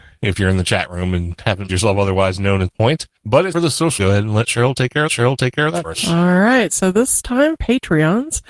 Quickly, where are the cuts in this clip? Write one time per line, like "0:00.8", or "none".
0:01.7
0:02.7
0:03.2
0:03.5
0:04.0
0:05.1
0:05.8
0:07.6